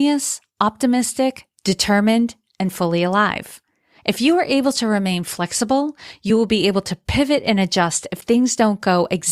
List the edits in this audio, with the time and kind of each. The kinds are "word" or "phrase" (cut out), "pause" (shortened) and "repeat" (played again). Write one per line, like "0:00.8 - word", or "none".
none